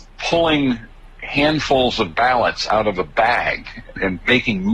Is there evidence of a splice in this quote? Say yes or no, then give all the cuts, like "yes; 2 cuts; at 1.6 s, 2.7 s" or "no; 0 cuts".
no; 0 cuts